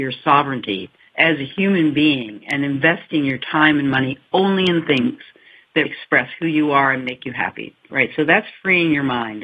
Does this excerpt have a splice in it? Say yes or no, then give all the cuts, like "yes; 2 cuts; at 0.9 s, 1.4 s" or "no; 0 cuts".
yes; 2 cuts; at 1.0 s, 5.9 s